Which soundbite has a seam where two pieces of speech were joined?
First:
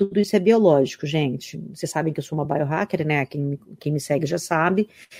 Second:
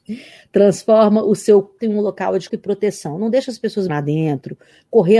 second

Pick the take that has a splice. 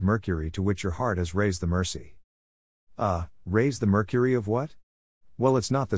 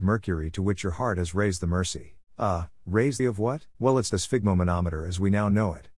second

